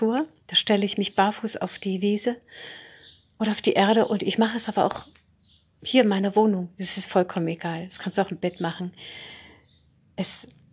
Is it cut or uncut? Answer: uncut